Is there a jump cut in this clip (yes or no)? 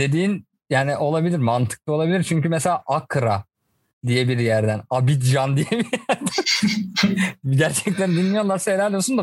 no